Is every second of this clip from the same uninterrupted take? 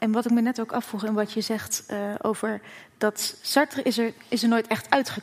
yes; 0 cuts

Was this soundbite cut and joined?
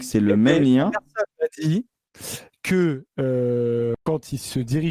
yes; 1 cut; at 4.0 s

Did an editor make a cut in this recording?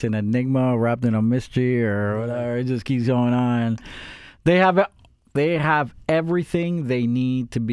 no; 0 cuts

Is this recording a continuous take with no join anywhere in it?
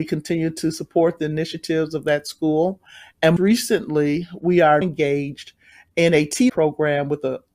no; 3 cuts; at 3.4 s, 4.8 s, 6.5 s

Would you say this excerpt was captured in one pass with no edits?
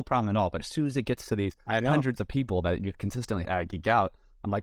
no; 1 cut; at 3.4 s

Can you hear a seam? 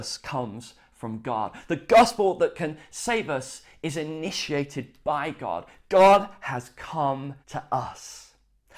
yes; 1 cut; at 7.4 s

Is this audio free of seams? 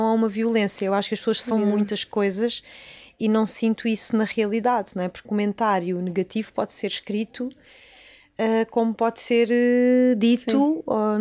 no; 2 cuts; at 1.5 s, 5.2 s

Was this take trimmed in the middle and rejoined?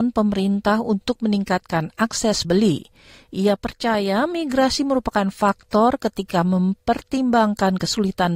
yes; 1 cut; at 2.4 s

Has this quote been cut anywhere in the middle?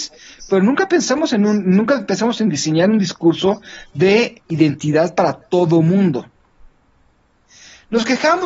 no; 0 cuts

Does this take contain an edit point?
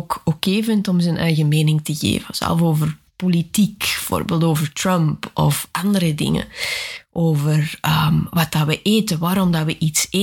yes; 1 cut; at 3.1 s

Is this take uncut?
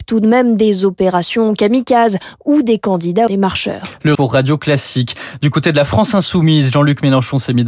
no; 2 cuts; at 3.3 s, 4.1 s

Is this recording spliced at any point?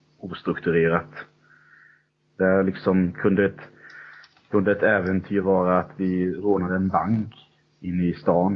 no; 0 cuts

